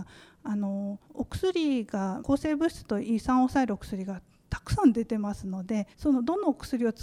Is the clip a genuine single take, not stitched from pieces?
no; 3 cuts; at 1.0 s, 2.2 s, 5.9 s

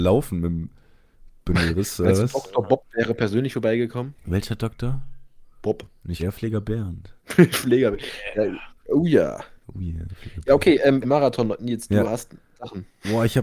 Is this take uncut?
no; 4 cuts; at 5.5 s, 6.2 s, 7.2 s, 11.0 s

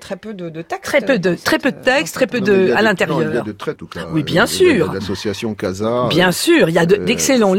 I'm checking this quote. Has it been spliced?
yes; 1 cut; at 3.8 s

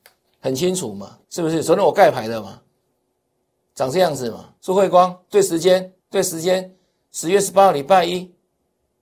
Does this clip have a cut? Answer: yes; 3 cuts; at 1.2 s, 4.6 s, 6.0 s

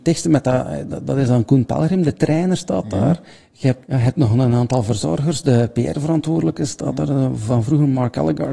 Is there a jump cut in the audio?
yes; 1 cut; at 3.9 s

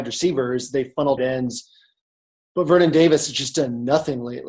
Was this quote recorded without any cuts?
no; 1 cut; at 1.2 s

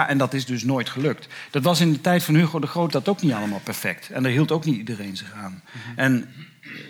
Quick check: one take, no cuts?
no; 1 cut; at 2.9 s

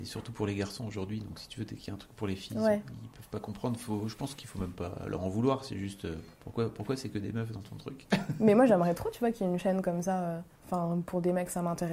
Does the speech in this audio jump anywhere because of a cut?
yes; 2 cuts; at 6.3 s, 10.5 s

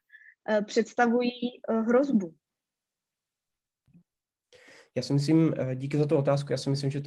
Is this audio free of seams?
yes; 0 cuts

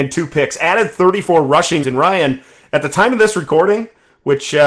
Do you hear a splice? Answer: yes; 1 cut; at 1.8 s

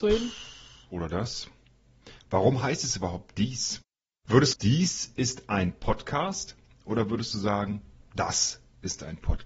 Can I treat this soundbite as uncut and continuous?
no; 1 cut; at 4.5 s

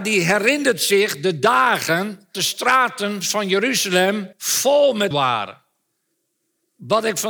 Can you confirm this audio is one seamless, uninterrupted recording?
no; 3 cuts; at 2.3 s, 4.3 s, 5.1 s

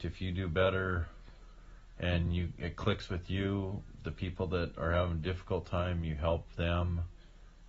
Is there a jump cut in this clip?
no; 0 cuts

